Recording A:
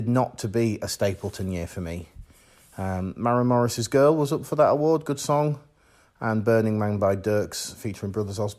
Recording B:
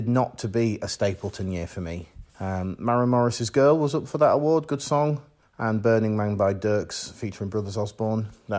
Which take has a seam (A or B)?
B